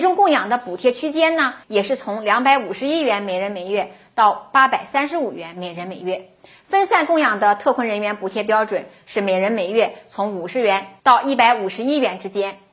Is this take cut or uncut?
uncut